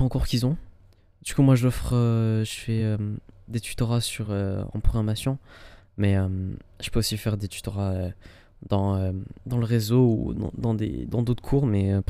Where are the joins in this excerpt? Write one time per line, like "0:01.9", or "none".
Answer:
none